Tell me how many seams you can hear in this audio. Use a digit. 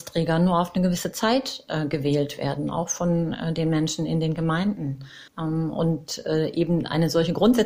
1